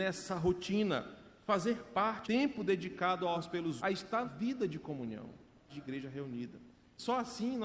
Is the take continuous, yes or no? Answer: no